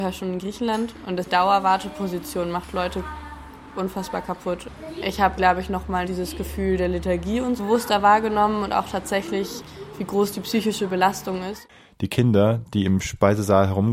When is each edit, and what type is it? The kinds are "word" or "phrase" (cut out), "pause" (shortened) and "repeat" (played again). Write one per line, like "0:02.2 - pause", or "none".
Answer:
0:01.3 - word
0:05.4 - word
0:06.0 - word
0:07.6 - word